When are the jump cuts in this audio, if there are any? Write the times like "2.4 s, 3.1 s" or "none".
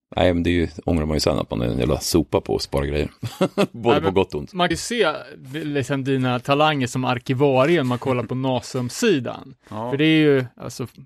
3.2 s, 4.7 s